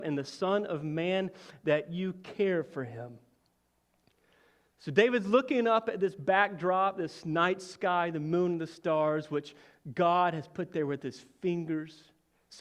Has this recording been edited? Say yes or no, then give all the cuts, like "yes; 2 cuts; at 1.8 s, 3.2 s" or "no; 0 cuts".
no; 0 cuts